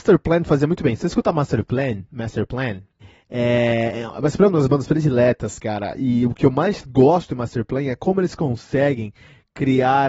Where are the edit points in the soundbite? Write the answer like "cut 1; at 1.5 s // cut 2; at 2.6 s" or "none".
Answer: cut 1; at 3.0 s